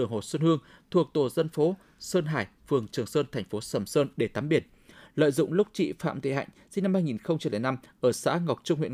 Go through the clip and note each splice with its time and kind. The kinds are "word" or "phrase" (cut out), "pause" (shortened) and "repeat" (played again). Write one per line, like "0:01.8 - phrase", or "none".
none